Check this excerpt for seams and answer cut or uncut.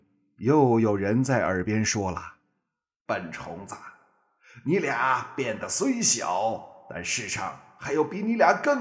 uncut